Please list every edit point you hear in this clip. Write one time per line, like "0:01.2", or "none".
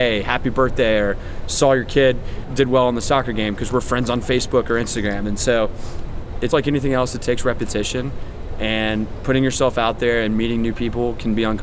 0:06.5